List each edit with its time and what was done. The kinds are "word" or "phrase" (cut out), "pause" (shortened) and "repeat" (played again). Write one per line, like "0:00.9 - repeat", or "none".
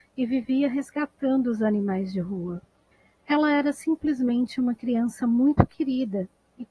0:02.9 - pause